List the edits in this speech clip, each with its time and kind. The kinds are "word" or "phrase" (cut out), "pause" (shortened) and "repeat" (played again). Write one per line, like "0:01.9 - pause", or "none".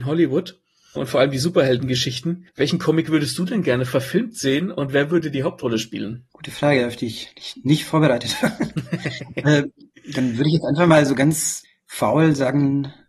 0:02.5 - pause
0:06.3 - pause